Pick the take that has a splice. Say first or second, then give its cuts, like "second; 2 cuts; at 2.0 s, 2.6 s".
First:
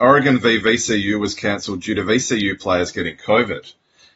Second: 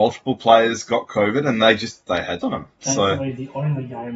second; 1 cut; at 2.4 s